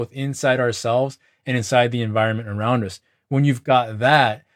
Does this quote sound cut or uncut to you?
uncut